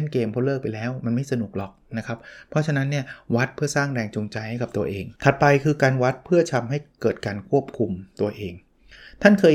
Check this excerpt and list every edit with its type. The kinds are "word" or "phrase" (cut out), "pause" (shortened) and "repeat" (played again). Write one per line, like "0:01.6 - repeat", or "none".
0:05.2 - pause